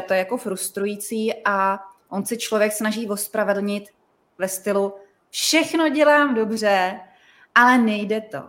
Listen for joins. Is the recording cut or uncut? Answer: uncut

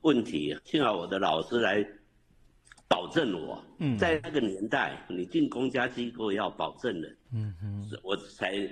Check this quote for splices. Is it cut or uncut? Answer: cut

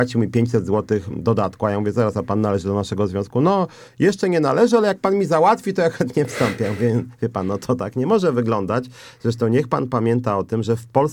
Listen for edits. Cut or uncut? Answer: uncut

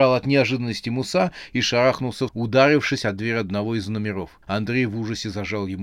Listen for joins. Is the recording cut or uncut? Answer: cut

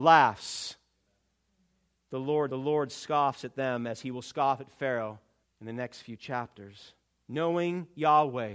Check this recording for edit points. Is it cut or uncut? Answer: cut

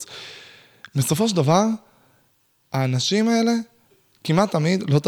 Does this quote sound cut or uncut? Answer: uncut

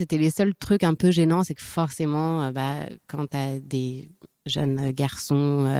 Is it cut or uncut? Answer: uncut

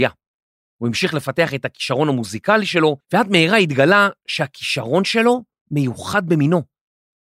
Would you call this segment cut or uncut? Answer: cut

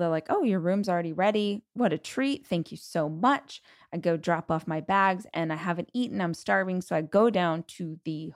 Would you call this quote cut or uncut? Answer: uncut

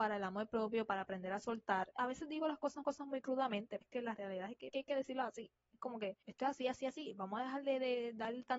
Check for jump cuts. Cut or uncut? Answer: cut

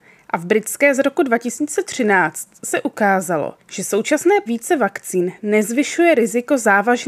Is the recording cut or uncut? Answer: cut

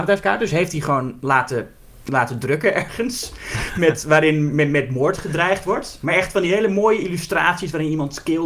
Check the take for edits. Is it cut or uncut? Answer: uncut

